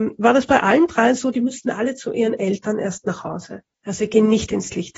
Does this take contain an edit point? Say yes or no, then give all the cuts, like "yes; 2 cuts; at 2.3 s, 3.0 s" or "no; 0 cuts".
no; 0 cuts